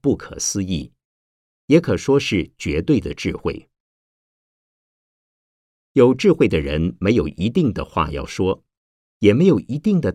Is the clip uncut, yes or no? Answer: yes